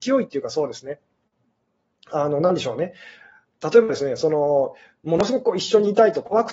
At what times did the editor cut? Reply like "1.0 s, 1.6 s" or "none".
none